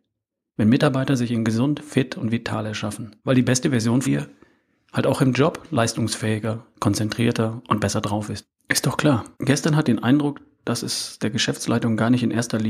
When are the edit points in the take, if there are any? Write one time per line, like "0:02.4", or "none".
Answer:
0:03.2
0:04.0
0:08.6
0:09.3
0:09.8